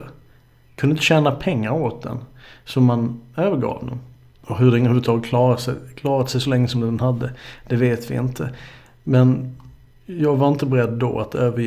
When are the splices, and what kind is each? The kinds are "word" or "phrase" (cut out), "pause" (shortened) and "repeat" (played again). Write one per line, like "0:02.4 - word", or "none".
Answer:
none